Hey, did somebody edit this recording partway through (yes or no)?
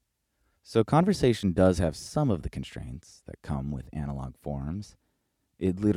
no